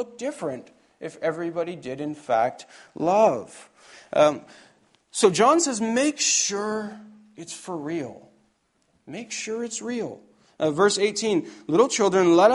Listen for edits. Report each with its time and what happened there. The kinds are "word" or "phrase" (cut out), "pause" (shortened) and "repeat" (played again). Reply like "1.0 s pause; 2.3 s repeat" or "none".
none